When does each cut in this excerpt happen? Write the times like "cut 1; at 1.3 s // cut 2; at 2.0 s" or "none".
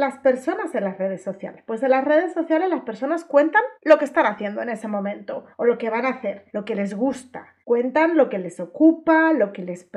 cut 1; at 3.8 s // cut 2; at 5.5 s // cut 3; at 6.5 s // cut 4; at 7.6 s